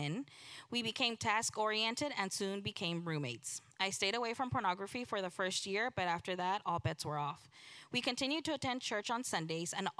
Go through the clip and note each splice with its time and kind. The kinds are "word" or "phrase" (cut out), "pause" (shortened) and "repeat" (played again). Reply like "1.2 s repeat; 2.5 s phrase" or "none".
none